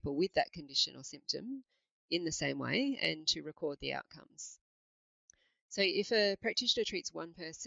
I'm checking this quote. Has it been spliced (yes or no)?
no